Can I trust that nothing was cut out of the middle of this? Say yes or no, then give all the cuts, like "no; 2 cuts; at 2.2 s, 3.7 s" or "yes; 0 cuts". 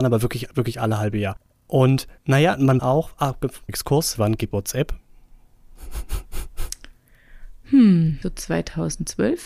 no; 6 cuts; at 2.2 s, 2.8 s, 3.7 s, 4.2 s, 4.5 s, 8.2 s